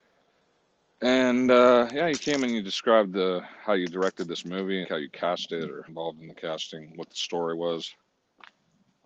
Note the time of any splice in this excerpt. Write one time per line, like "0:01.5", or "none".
0:04.8
0:05.9